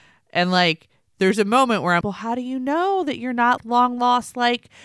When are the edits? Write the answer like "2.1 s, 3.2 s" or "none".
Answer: 2.0 s, 3.6 s